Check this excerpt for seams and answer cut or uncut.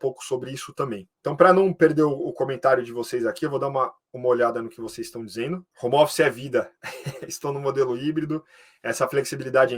cut